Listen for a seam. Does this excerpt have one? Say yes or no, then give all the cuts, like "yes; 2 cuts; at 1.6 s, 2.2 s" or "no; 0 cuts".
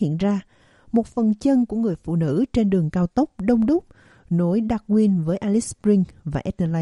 no; 0 cuts